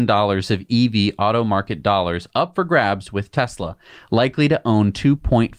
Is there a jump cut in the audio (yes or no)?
no